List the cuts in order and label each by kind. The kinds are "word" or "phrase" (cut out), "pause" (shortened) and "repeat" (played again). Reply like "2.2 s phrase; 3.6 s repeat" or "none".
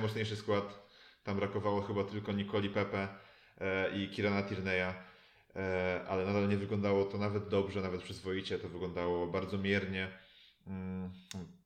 none

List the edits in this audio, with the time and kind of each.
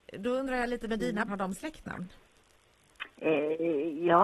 1.3 s word; 3.1 s pause

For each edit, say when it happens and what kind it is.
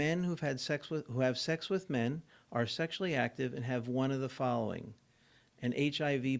none

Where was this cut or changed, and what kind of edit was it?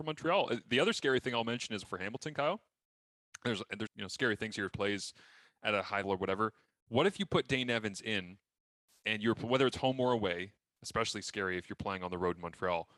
1.8 s word; 3.9 s word; 4.7 s word; 6.0 s word

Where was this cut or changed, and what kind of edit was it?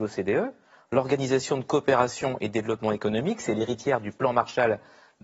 none

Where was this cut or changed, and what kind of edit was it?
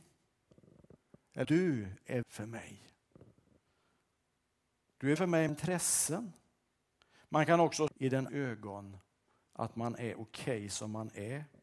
1.4 s word; 2.2 s word; 5.2 s word; 5.5 s word; 7.9 s word; 8.3 s word

